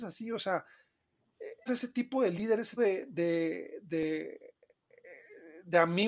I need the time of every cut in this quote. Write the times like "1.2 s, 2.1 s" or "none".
1.7 s, 2.8 s